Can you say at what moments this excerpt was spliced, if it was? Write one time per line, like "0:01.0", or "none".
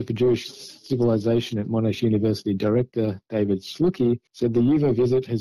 0:04.3